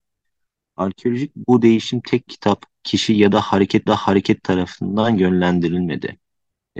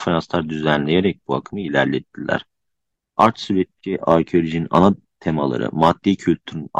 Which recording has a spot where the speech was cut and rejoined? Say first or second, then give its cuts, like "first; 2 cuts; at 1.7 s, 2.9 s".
first; 3 cuts; at 1.3 s, 2.3 s, 3.9 s